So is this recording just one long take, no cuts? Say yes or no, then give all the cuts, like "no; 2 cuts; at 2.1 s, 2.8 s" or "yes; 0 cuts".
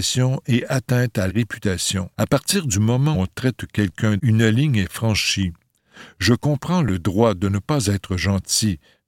no; 4 cuts; at 1.3 s, 2.1 s, 3.1 s, 4.2 s